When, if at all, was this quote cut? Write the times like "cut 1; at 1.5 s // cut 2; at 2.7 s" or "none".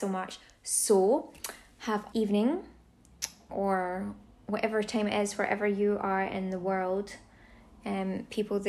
cut 1; at 2.1 s // cut 2; at 3.5 s